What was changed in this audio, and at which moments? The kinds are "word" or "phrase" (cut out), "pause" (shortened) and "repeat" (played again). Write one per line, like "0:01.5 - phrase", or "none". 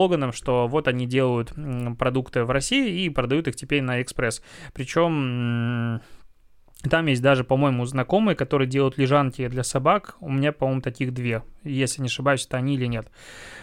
none